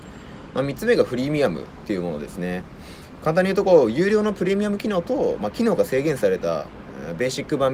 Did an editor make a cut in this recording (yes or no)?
no